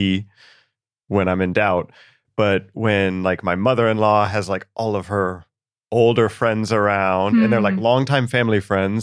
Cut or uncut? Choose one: uncut